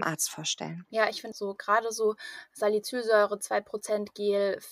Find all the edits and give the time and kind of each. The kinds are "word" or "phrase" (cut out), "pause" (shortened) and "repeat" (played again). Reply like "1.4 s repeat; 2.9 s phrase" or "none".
1.3 s word